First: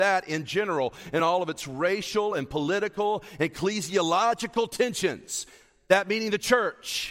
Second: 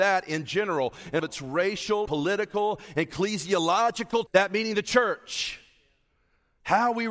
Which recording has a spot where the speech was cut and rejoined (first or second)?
second